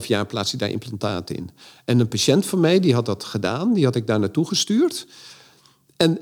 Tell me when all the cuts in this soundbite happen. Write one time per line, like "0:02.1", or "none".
none